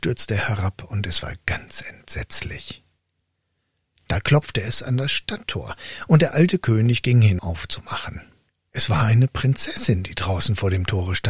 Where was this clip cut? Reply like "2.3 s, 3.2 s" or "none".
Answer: 7.4 s, 8.5 s